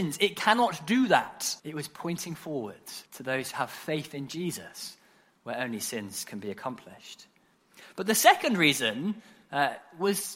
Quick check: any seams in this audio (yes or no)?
yes